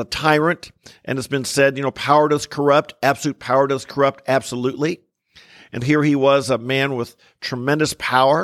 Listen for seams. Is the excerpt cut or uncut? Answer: cut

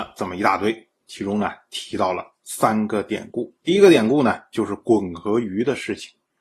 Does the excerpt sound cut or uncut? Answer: cut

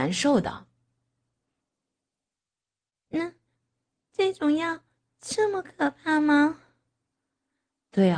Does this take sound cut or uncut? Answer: uncut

